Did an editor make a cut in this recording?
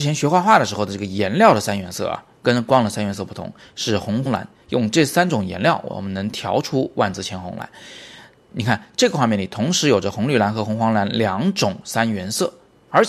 yes; 1 cut; at 4.3 s

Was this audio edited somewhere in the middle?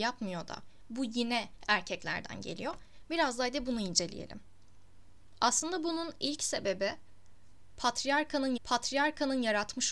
yes; 1 cut; at 8.6 s

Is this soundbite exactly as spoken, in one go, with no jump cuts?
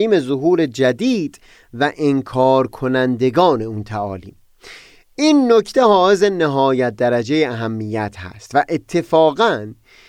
yes; 0 cuts

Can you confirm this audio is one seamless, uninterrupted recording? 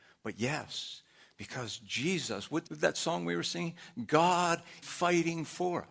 no; 2 cuts; at 2.6 s, 4.8 s

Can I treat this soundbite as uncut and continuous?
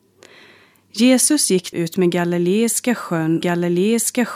no; 2 cuts; at 1.7 s, 3.4 s

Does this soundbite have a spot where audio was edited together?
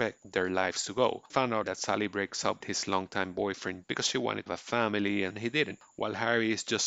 yes; 6 cuts; at 1.3 s, 1.6 s, 2.6 s, 3.8 s, 4.5 s, 5.3 s

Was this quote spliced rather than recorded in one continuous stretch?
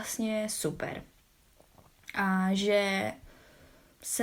no; 0 cuts

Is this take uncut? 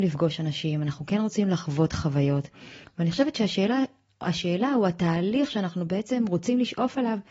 yes; 0 cuts

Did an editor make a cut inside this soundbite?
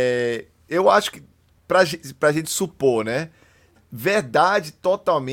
no; 0 cuts

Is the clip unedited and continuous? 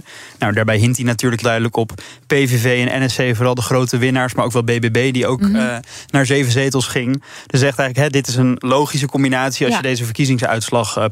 no; 1 cut; at 1.4 s

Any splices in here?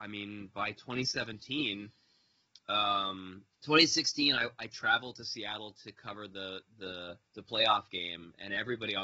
yes; 2 cuts; at 3.5 s, 7.3 s

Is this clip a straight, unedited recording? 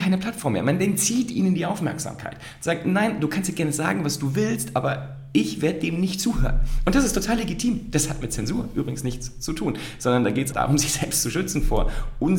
no; 1 cut; at 10.5 s

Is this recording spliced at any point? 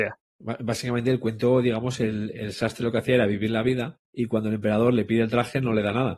yes; 1 cut; at 4.0 s

